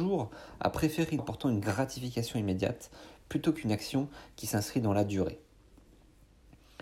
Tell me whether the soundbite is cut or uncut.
cut